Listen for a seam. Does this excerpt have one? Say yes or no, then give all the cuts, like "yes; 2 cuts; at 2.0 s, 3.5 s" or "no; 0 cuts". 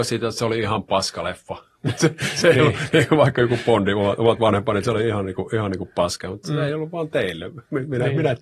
no; 0 cuts